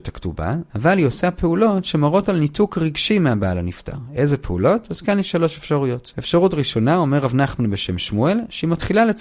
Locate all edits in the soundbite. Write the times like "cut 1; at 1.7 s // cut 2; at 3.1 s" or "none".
none